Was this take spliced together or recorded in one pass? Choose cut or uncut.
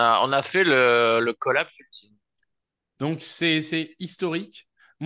uncut